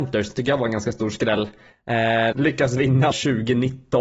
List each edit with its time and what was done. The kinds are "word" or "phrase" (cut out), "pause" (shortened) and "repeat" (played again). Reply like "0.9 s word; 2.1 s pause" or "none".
2.3 s word; 3.1 s word